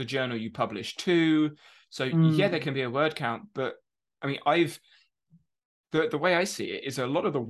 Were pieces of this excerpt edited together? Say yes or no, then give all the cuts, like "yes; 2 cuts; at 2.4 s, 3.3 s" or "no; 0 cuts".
no; 0 cuts